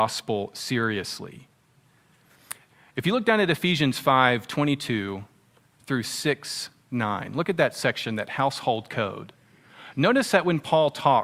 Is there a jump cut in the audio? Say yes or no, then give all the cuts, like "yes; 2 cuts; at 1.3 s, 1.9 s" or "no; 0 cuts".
no; 0 cuts